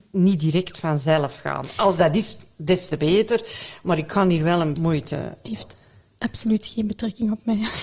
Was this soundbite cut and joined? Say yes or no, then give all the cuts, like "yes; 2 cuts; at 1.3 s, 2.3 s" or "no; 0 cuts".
yes; 1 cut; at 4.7 s